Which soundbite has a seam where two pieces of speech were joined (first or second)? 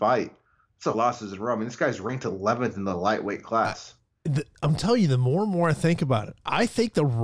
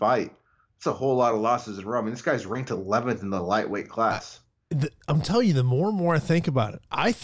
first